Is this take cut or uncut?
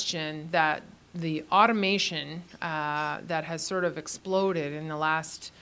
uncut